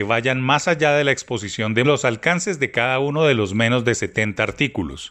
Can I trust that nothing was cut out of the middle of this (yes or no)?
no